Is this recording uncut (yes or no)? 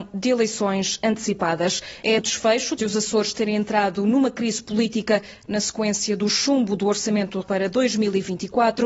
no